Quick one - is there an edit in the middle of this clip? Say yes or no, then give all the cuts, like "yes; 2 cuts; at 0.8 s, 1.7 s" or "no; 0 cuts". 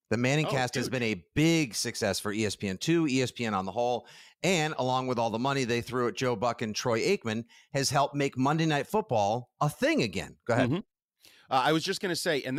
no; 0 cuts